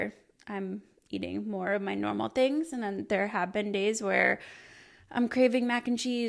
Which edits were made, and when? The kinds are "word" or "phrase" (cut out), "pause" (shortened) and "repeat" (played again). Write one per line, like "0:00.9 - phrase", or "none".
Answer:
none